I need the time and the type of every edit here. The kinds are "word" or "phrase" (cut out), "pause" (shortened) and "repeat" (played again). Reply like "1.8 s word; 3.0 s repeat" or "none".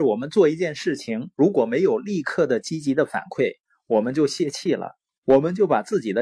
none

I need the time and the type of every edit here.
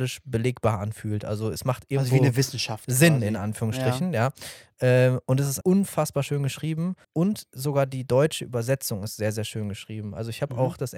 5.6 s word; 7.0 s pause

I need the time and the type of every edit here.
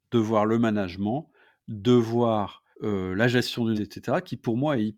2.7 s pause; 3.7 s word

